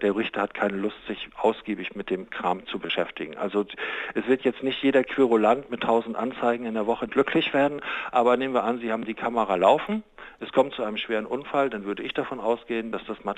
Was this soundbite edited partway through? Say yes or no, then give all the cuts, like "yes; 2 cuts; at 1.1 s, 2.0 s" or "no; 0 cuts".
yes; 2 cuts; at 1.3 s, 7.1 s